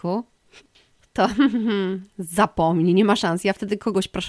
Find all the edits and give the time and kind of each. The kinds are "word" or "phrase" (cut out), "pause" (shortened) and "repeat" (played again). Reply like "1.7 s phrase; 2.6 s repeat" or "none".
none